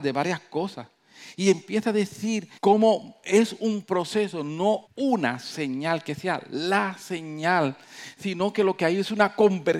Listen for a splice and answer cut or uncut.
cut